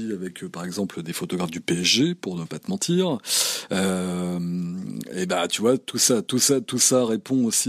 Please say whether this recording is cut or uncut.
cut